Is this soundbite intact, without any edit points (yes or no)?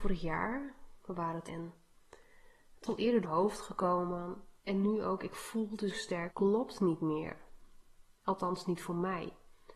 no